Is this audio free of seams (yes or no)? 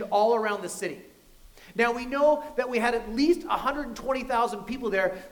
yes